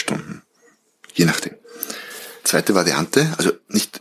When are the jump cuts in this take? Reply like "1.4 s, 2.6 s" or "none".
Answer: 2.4 s